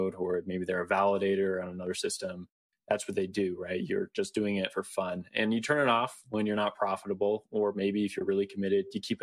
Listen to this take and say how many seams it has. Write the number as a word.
zero